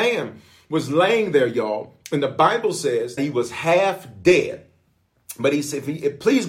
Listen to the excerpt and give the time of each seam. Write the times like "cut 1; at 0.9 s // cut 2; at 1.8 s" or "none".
cut 1; at 3.2 s